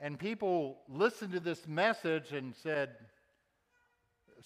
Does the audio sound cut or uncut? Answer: uncut